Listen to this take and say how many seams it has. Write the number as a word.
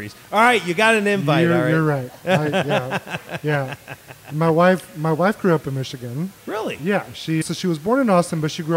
two